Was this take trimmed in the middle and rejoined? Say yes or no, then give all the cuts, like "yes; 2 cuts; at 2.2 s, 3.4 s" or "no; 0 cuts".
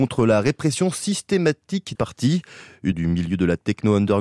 yes; 2 cuts; at 1.9 s, 2.9 s